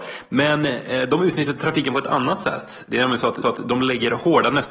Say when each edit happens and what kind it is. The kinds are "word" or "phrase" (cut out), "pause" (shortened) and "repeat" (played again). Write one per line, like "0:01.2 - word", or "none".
0:03.4 - repeat